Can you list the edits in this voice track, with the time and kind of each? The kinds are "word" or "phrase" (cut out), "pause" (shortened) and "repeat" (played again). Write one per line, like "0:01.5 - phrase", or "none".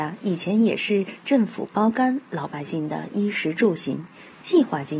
none